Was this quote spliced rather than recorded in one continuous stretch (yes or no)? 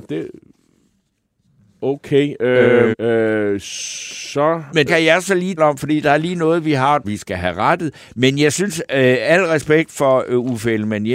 yes